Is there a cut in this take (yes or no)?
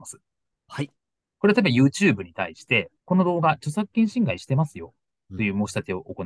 yes